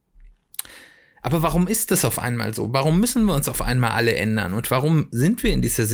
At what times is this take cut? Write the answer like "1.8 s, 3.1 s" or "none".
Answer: none